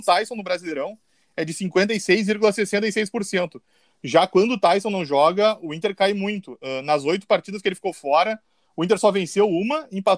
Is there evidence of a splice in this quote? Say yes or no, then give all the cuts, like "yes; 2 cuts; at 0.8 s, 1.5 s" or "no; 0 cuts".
no; 0 cuts